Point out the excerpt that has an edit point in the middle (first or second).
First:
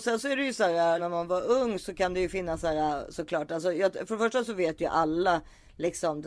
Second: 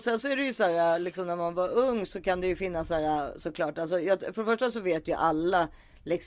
first